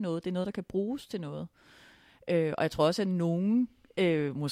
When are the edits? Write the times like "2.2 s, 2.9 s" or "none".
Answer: none